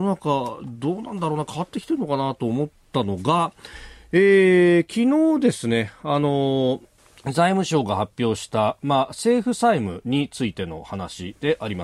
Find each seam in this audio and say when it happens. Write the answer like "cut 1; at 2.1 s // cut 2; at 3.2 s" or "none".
cut 1; at 7.0 s